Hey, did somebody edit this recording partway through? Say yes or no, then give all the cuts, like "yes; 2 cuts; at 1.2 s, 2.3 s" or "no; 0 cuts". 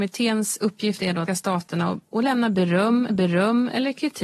yes; 2 cuts; at 1.3 s, 3.1 s